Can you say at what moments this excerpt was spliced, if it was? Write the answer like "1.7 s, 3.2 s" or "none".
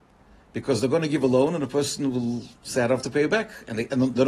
2.6 s